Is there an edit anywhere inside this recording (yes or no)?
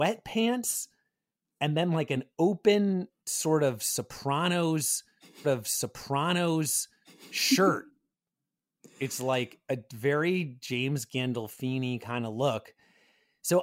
yes